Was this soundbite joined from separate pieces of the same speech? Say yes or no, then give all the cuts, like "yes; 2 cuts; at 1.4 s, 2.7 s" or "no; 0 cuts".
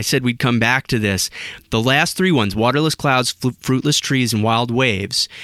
no; 0 cuts